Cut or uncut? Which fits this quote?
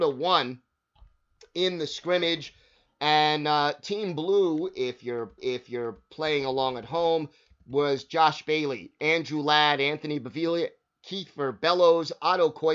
cut